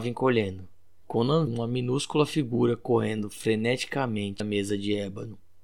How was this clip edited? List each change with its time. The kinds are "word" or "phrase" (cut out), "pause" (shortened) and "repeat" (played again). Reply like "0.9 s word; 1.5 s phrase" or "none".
1.5 s word; 4.4 s word